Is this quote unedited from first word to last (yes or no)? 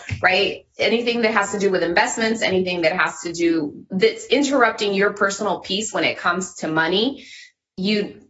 yes